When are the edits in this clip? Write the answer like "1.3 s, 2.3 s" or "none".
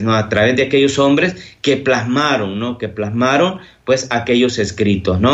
none